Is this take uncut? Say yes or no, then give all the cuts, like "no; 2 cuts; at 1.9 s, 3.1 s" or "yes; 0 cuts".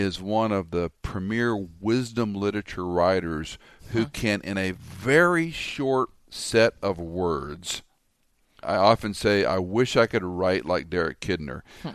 no; 1 cut; at 8.6 s